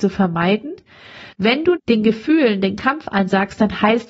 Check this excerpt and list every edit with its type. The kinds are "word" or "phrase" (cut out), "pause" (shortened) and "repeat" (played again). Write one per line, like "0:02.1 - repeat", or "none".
0:01.3 - pause
0:01.8 - word